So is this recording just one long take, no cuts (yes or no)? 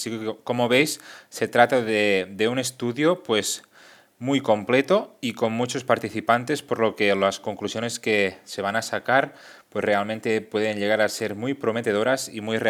yes